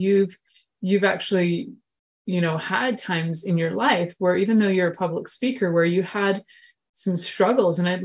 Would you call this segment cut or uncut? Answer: uncut